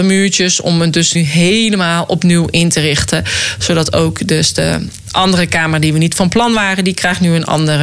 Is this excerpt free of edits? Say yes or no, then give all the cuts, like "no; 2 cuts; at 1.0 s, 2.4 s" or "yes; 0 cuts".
no; 1 cut; at 1.2 s